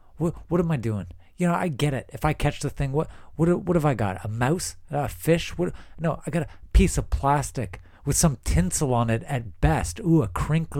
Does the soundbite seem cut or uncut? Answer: uncut